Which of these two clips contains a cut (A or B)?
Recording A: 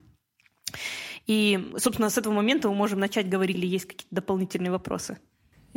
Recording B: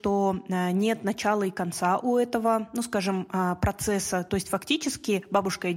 A